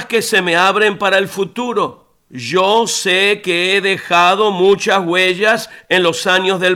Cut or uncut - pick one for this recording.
uncut